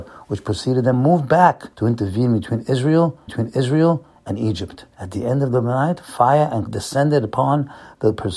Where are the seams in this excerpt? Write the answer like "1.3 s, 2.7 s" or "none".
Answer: 0.9 s, 1.7 s, 3.3 s, 4.9 s, 6.7 s